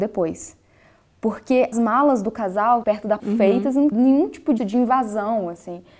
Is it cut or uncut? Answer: cut